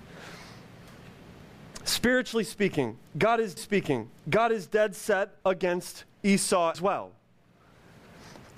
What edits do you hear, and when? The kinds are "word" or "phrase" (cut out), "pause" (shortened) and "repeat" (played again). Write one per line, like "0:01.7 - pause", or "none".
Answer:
0:03.6 - repeat
0:05.4 - pause
0:06.7 - word